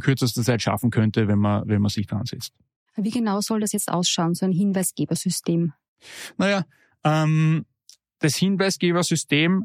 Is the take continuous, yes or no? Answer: yes